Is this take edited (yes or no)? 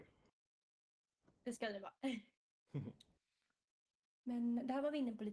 yes